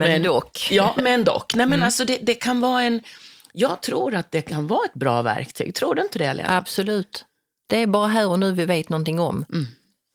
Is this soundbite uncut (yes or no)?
yes